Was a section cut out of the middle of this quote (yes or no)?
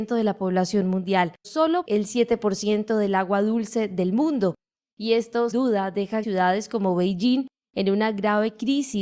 yes